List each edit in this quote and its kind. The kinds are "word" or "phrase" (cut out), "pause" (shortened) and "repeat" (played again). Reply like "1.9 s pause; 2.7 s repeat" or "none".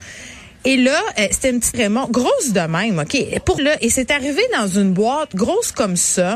1.7 s word; 3.6 s word